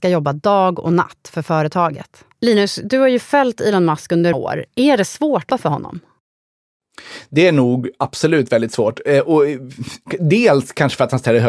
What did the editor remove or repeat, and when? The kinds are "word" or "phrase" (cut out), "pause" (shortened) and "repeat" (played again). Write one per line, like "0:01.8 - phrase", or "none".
0:02.3 - pause
0:04.3 - word
0:04.7 - pause
0:05.5 - word